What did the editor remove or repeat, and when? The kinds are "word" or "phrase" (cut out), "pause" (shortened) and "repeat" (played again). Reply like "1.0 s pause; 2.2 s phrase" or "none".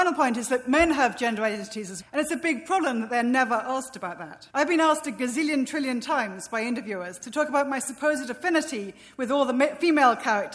2.0 s word; 4.5 s pause